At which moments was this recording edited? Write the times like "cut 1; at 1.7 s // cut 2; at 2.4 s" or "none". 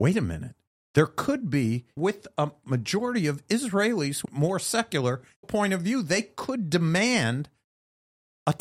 cut 1; at 2.0 s // cut 2; at 4.2 s // cut 3; at 5.4 s